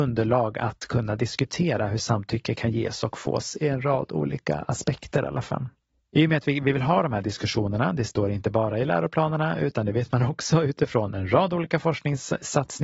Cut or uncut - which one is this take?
uncut